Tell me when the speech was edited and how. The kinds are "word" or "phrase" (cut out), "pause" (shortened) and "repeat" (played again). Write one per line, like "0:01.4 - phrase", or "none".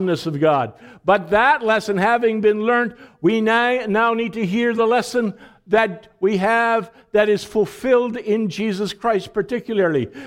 none